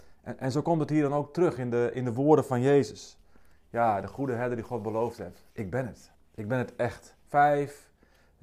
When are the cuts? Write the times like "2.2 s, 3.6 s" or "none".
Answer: 5.5 s, 6.1 s, 7.2 s